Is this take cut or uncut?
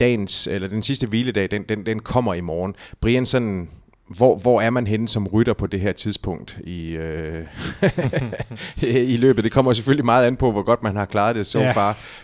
uncut